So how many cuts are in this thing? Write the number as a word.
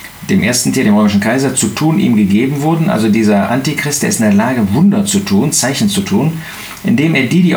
zero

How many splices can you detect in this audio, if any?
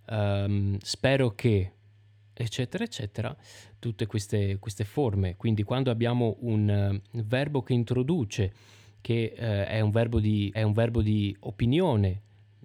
one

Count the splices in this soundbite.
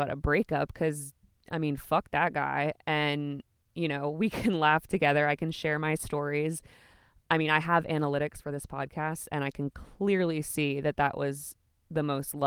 zero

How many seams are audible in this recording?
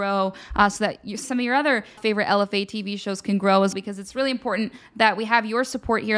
three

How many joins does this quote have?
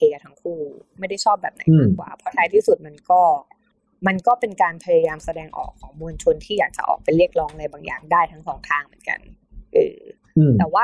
zero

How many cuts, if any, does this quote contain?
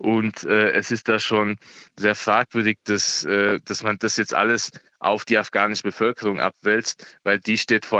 zero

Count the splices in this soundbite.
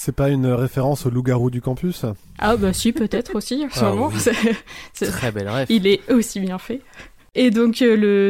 zero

